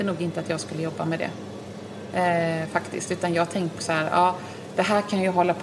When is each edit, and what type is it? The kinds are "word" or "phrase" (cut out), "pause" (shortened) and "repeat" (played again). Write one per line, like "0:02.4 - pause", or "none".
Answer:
0:03.8 - word